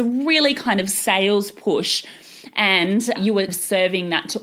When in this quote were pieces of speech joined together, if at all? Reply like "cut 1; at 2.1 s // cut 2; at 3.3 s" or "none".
cut 1; at 3.2 s // cut 2; at 3.5 s